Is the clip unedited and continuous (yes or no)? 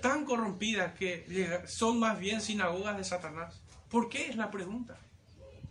no